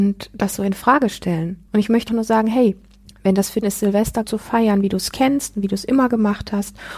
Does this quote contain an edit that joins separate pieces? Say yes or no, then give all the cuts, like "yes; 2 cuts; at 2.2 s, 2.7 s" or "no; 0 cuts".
yes; 5 cuts; at 1.7 s, 2.1 s, 3.0 s, 3.6 s, 4.2 s